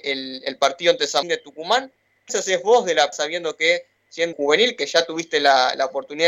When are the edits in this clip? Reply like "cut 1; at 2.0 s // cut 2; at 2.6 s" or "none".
cut 1; at 1.2 s // cut 2; at 2.3 s // cut 3; at 3.1 s // cut 4; at 4.3 s